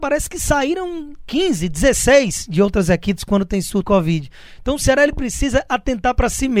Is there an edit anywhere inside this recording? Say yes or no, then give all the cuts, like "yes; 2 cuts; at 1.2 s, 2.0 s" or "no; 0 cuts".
yes; 1 cut; at 3.8 s